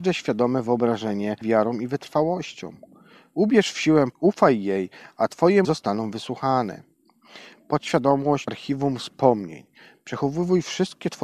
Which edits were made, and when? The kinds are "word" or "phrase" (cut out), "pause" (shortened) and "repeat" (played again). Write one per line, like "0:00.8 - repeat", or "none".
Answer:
0:01.4 - word
0:04.1 - word
0:05.6 - word
0:08.5 - word